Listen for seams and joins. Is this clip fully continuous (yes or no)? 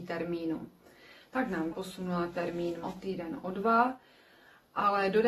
no